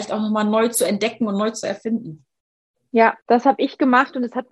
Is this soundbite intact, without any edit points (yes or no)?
no